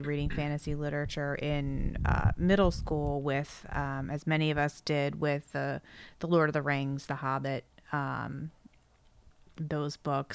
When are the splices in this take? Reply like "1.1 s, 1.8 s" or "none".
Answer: none